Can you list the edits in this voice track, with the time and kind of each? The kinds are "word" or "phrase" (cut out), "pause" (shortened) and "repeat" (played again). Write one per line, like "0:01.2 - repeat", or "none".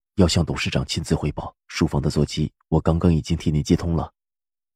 0:01.6 - pause